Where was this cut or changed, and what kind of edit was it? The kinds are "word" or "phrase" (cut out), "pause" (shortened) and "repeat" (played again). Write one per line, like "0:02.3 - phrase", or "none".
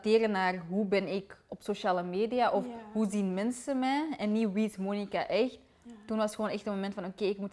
none